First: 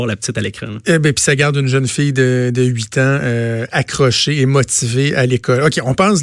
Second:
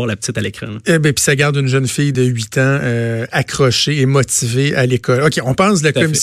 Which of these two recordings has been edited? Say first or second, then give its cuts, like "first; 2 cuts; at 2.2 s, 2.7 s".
second; 1 cut; at 2.1 s